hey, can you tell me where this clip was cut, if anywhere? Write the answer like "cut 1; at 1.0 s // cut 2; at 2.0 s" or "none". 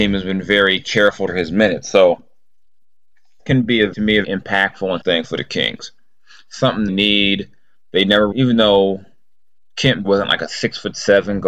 cut 1; at 1.3 s // cut 2; at 3.4 s // cut 3; at 3.9 s // cut 4; at 4.2 s // cut 5; at 5.0 s // cut 6; at 6.9 s // cut 7; at 8.3 s // cut 8; at 10.0 s